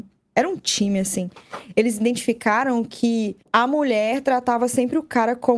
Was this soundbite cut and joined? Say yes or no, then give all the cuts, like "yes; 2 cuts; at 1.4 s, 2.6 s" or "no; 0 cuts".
yes; 1 cut; at 3.4 s